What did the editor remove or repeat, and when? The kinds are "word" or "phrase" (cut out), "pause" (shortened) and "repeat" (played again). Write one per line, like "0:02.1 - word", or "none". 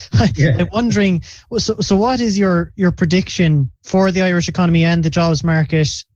0:03.8 - pause